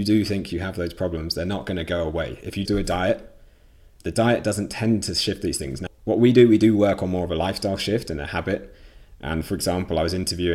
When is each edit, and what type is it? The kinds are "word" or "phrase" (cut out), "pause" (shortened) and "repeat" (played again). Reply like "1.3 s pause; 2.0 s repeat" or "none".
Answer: 2.7 s word; 4.0 s word; 5.9 s word